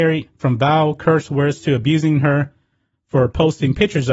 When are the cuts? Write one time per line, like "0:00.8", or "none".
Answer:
none